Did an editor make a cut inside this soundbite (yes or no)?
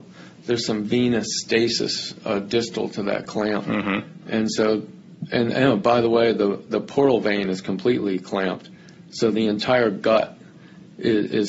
no